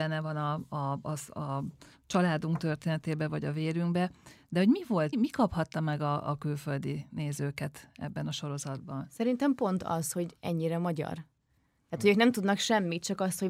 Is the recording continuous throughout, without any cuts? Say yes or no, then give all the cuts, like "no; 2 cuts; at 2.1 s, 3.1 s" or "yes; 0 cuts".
no; 2 cuts; at 1.0 s, 5.1 s